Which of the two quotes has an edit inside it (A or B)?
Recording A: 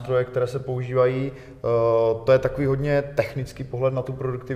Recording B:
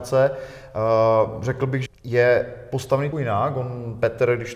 B